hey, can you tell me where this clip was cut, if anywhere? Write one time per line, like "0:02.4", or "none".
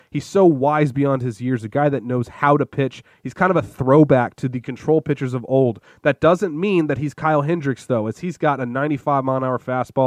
none